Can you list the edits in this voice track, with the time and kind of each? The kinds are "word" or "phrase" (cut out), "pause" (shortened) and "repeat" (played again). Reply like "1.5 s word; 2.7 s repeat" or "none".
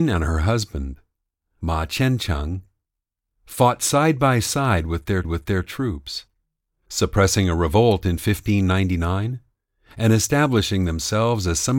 5.2 s repeat